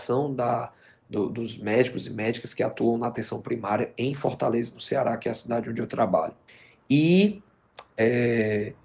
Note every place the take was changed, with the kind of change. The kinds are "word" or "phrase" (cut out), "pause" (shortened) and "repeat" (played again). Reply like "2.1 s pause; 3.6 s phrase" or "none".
6.5 s pause